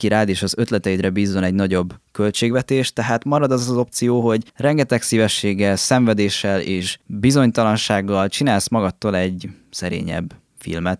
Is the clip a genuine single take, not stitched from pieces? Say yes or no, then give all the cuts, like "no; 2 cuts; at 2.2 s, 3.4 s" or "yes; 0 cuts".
yes; 0 cuts